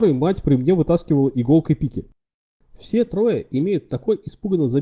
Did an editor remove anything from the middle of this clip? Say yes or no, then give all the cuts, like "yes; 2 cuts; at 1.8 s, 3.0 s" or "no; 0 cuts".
no; 0 cuts